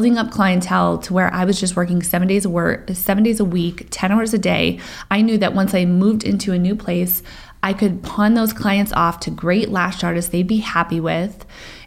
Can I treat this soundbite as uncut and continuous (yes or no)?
yes